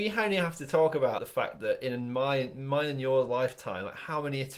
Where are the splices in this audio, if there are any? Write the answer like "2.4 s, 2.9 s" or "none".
1.2 s